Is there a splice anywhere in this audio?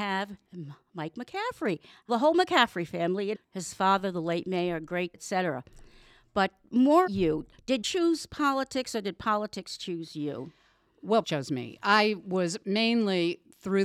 yes; 6 cuts; at 2.1 s, 3.3 s, 5.1 s, 7.1 s, 7.8 s, 11.2 s

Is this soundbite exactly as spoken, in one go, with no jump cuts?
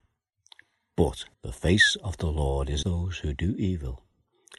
no; 2 cuts; at 1.3 s, 2.8 s

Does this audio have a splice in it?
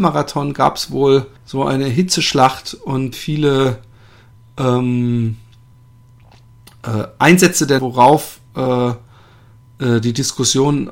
yes; 3 cuts; at 1.4 s, 3.1 s, 7.8 s

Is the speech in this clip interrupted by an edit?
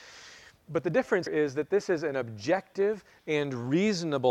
yes; 1 cut; at 1.3 s

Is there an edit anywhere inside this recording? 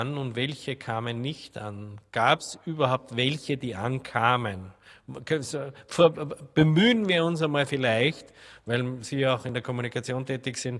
no; 0 cuts

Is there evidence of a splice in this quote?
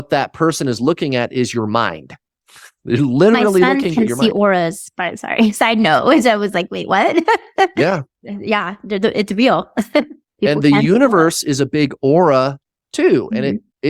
no; 0 cuts

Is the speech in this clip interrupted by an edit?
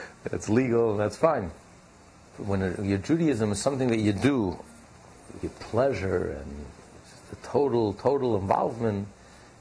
yes; 1 cut; at 5.4 s

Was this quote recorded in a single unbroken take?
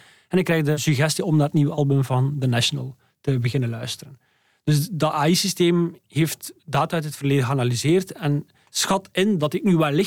yes; 0 cuts

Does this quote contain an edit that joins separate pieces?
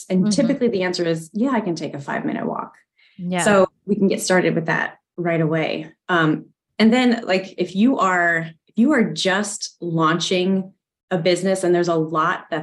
no; 0 cuts

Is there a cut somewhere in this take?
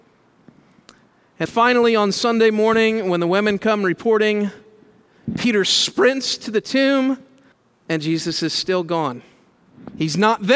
yes; 2 cuts; at 1.5 s, 7.5 s

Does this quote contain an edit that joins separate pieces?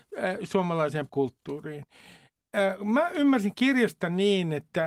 yes; 1 cut; at 1.1 s

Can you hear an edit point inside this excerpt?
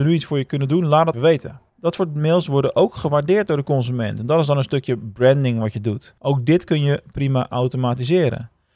yes; 3 cuts; at 1.1 s, 1.7 s, 6.2 s

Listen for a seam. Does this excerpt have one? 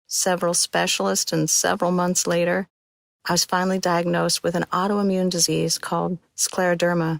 no; 0 cuts

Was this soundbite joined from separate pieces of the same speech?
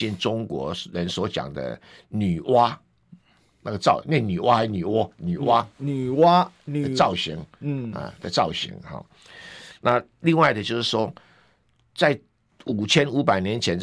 no; 0 cuts

